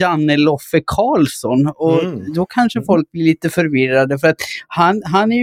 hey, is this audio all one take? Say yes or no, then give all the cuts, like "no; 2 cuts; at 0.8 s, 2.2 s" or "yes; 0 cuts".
yes; 0 cuts